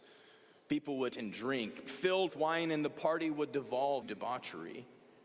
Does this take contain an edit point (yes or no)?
yes